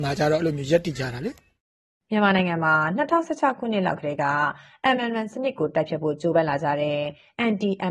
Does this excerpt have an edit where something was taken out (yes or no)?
no